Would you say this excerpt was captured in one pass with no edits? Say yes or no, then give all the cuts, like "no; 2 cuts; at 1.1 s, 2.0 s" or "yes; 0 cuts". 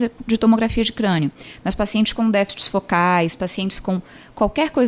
yes; 0 cuts